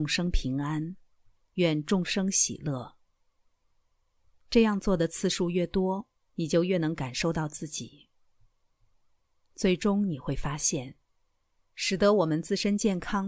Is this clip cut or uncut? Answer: uncut